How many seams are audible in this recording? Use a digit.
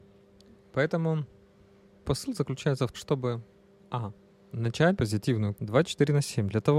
4